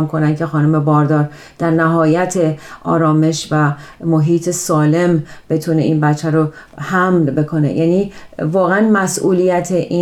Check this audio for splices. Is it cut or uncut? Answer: uncut